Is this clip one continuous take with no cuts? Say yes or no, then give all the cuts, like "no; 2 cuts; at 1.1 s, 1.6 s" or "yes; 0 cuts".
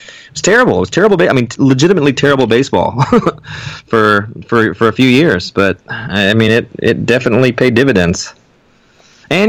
yes; 0 cuts